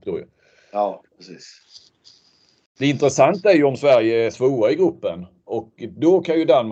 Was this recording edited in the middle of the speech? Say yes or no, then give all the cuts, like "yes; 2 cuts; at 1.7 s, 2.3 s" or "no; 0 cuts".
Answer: yes; 2 cuts; at 1.1 s, 4.3 s